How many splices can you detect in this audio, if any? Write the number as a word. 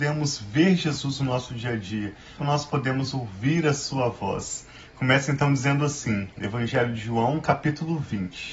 one